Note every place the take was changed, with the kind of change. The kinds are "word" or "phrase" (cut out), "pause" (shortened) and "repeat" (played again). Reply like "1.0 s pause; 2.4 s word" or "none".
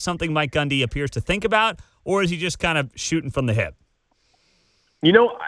none

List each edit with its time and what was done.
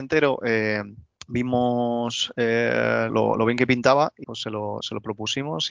1.2 s pause; 3.1 s word; 4.2 s word

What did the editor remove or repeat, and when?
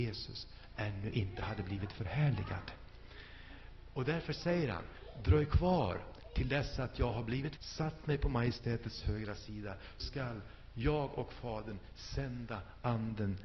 7.6 s word; 10.0 s word

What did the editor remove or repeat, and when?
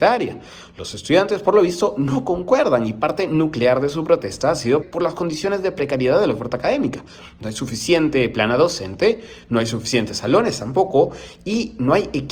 4.8 s word

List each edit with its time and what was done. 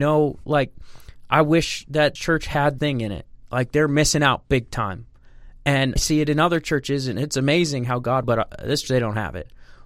2.2 s word; 2.8 s word; 6.0 s word; 8.2 s phrase; 8.8 s word

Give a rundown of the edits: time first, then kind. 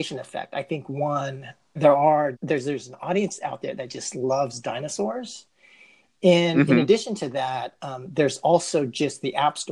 1.8 s word; 2.3 s word

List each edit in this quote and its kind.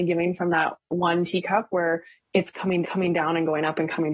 2.8 s repeat

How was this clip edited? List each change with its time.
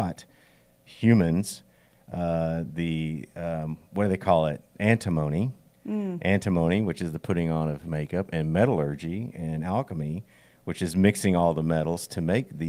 none

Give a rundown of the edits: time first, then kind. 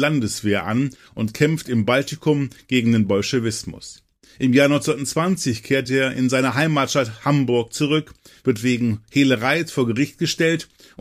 none

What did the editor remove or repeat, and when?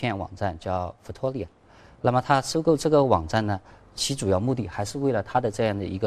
none

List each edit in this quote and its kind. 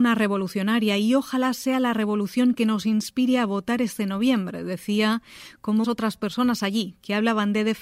5.8 s word

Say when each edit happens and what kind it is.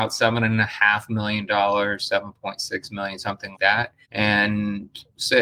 3.5 s word; 4.0 s pause

